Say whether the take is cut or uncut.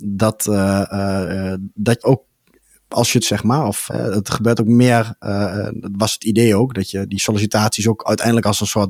cut